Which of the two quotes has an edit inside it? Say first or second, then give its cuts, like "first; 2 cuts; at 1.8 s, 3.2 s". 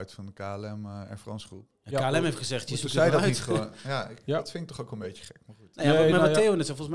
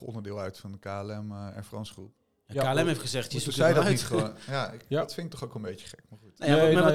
first; 1 cut; at 1.7 s